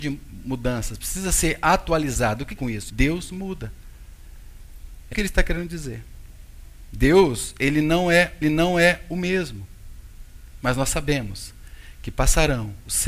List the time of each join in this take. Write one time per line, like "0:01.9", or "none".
0:02.6
0:02.9
0:05.1
0:08.4